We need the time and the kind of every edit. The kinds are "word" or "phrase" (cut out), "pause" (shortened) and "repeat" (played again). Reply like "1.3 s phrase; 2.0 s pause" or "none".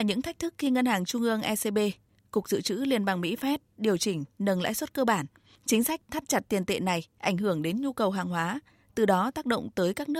none